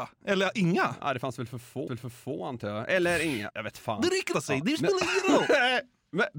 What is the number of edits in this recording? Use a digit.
3